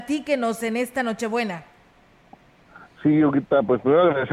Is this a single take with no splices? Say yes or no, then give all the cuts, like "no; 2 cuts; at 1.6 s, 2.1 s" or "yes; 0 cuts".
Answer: yes; 0 cuts